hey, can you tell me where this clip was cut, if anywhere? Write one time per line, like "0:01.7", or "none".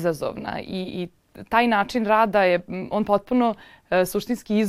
none

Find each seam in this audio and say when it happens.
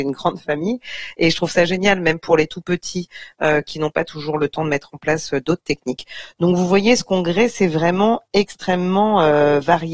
none

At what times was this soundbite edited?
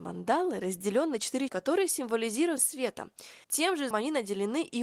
0:01.5
0:02.6
0:03.4
0:03.9

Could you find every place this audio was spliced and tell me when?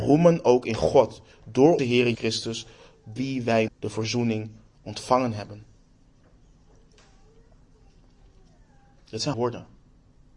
0:01.8
0:02.1
0:03.2
0:03.7
0:09.3

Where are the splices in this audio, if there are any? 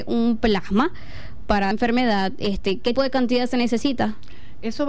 0:01.7
0:02.9

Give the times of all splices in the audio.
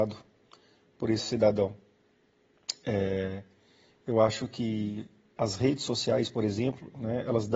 none

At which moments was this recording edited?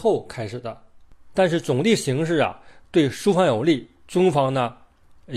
none

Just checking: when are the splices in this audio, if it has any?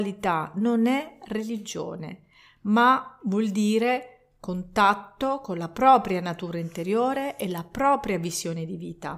none

